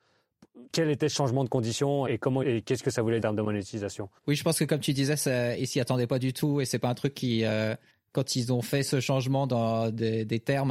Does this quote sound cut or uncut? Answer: cut